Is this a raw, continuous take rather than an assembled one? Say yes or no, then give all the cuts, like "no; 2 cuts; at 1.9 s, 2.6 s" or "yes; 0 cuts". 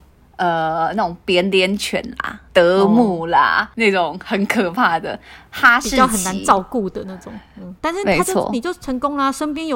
no; 2 cuts; at 2.5 s, 7.8 s